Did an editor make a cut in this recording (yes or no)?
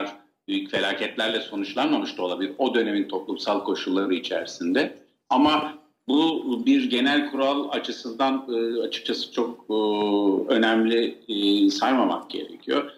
no